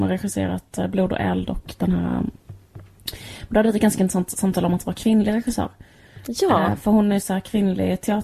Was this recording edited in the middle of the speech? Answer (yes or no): no